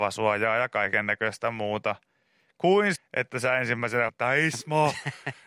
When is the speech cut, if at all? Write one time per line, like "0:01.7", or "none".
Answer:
0:03.0
0:04.1